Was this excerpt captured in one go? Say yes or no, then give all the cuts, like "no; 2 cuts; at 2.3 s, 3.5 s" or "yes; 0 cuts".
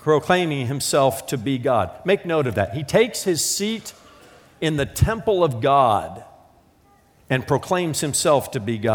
yes; 0 cuts